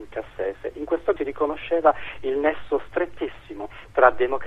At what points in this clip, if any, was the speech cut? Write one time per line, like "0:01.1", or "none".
0:01.2